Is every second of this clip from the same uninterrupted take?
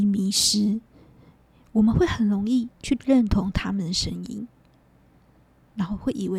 no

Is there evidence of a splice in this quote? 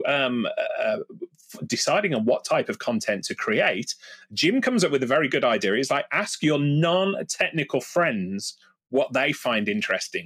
no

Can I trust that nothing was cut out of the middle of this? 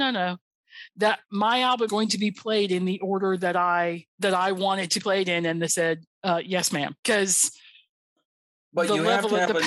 no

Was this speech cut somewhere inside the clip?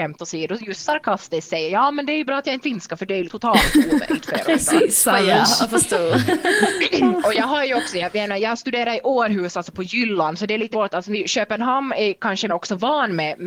yes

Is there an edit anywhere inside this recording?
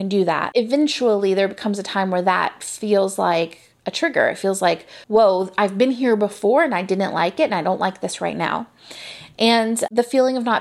yes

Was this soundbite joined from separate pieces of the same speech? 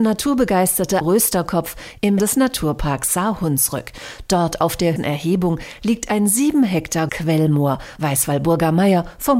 yes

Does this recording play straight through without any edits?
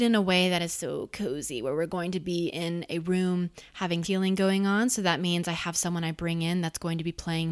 no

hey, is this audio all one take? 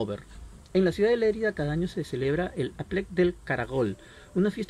yes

